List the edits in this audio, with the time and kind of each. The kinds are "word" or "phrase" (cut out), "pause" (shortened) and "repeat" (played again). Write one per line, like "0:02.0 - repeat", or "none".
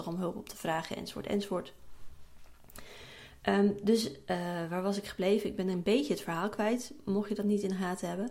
none